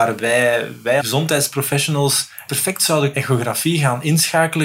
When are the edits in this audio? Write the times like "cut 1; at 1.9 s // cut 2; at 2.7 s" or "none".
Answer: cut 1; at 1.0 s // cut 2; at 2.5 s // cut 3; at 3.1 s